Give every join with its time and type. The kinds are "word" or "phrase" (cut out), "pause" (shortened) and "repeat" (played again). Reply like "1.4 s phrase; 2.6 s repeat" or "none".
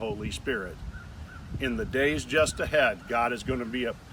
none

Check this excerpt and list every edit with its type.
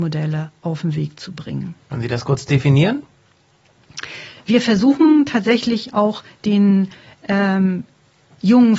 none

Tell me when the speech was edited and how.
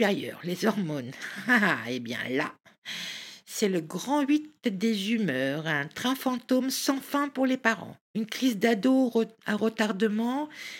8.0 s pause

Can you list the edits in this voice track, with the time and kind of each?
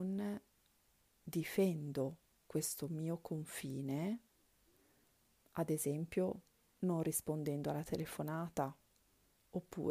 none

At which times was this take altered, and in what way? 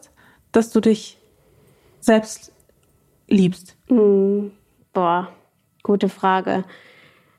none

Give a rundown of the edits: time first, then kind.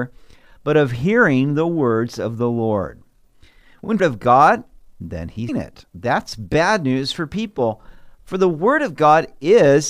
4.0 s phrase; 5.5 s phrase; 5.9 s pause

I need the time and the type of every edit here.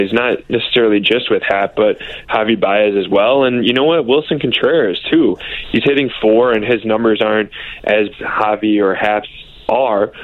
8.1 s phrase

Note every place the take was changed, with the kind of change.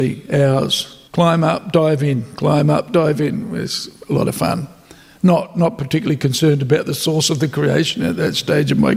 1.1 s pause

